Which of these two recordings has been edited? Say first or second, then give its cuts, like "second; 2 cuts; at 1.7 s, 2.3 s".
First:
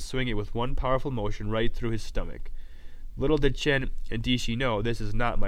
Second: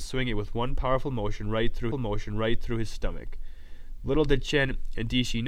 second; 1 cut; at 1.9 s